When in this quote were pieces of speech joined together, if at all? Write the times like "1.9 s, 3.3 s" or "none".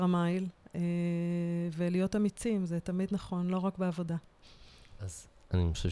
none